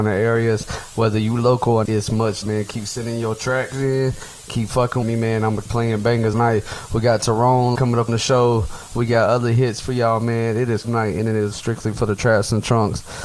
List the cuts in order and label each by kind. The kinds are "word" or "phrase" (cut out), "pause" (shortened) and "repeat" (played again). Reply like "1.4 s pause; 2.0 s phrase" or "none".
1.9 s word; 2.4 s word; 5.0 s word; 5.7 s word; 6.3 s word; 7.8 s word; 8.1 s word; 10.8 s word; 11.5 s word